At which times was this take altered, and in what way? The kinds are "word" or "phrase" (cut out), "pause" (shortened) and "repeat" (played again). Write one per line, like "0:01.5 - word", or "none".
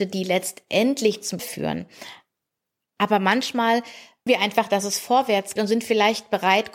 0:01.4 - word
0:04.3 - word
0:05.6 - word

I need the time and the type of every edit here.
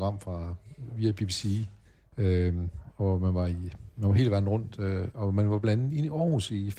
0:01.8 - pause

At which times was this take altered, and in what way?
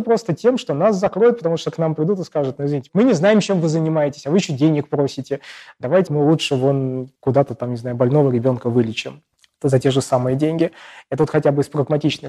0:02.9 - word
0:06.1 - word
0:07.2 - pause
0:09.3 - pause

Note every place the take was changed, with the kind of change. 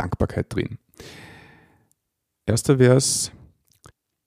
none

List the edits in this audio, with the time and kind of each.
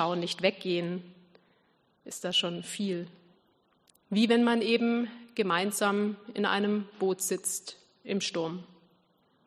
none

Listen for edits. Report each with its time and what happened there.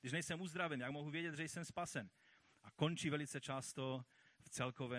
none

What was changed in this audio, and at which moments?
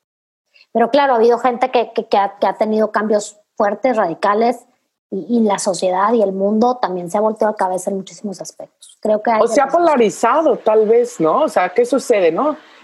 none

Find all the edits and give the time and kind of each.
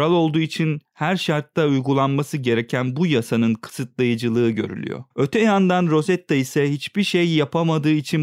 0:05.1 - pause

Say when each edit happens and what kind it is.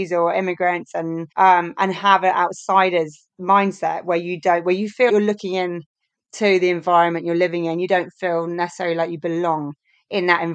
0:01.3 - pause
0:03.3 - pause
0:05.1 - word

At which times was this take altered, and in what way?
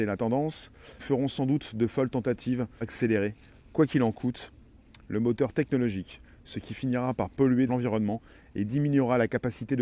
0:01.0 - word
0:02.8 - word
0:07.7 - word

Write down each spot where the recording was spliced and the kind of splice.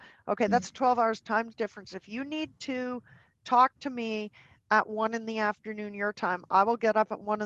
none

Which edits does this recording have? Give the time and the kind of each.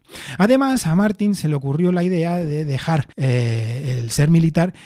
0:03.1 - pause

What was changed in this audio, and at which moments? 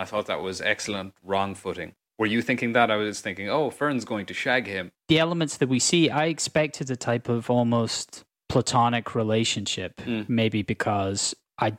none

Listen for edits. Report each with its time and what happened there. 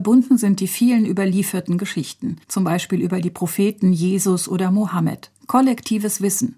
0:02.4 - pause
0:05.4 - pause

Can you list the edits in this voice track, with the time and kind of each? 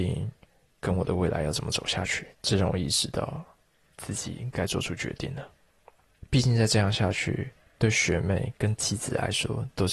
0:02.3 - pause

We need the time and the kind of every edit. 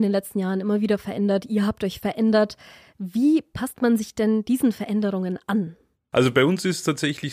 none

